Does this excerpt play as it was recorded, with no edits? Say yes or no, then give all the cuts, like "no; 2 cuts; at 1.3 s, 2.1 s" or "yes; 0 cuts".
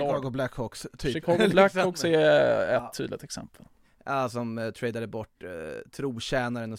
yes; 0 cuts